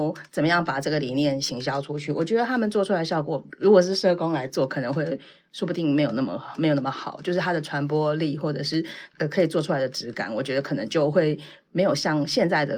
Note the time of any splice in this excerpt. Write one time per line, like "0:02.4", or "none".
none